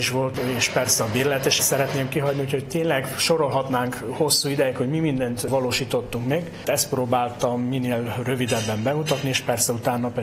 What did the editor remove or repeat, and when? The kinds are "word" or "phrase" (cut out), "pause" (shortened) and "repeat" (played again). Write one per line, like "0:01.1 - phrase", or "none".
0:01.6 - phrase